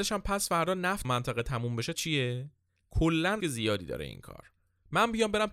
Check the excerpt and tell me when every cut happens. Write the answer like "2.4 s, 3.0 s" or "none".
1.0 s, 1.9 s, 3.4 s

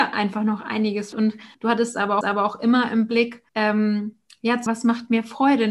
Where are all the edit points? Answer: 1.1 s, 1.5 s, 2.2 s, 3.5 s, 4.7 s

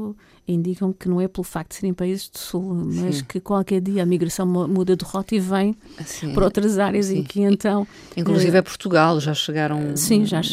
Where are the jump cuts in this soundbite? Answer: none

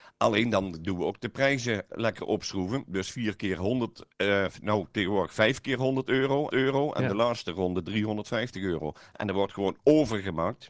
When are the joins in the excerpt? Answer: 4.1 s, 6.5 s

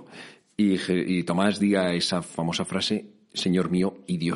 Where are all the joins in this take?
none

